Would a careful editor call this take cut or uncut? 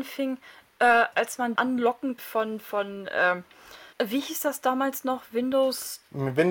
cut